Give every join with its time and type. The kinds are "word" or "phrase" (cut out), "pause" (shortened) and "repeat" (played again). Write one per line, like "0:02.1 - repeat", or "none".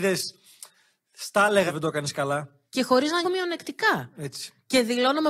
0:01.7 - word
0:02.7 - pause
0:03.2 - word